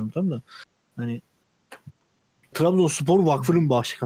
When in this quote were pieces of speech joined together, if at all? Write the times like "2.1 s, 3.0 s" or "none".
2.5 s